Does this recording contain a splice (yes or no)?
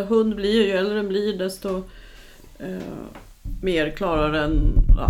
no